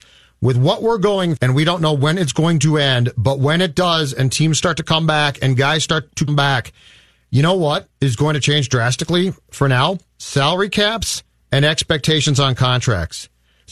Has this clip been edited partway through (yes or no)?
yes